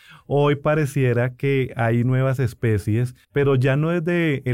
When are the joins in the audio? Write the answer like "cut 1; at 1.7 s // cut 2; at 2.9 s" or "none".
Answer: cut 1; at 3.2 s